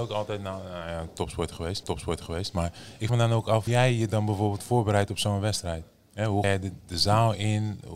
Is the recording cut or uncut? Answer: cut